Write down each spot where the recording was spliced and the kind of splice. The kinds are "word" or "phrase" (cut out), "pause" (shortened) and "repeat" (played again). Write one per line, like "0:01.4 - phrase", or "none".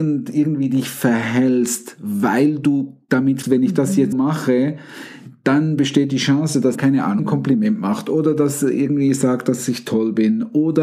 0:03.4 - word
0:04.1 - word
0:06.7 - word
0:07.2 - word